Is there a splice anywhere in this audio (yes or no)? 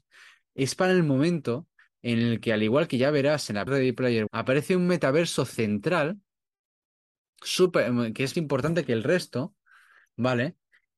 yes